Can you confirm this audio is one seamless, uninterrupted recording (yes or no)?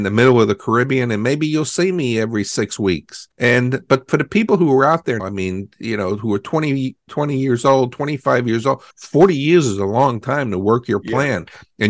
no